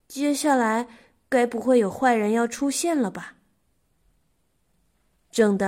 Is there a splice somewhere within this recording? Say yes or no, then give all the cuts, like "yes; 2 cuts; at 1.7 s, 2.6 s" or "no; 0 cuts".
no; 0 cuts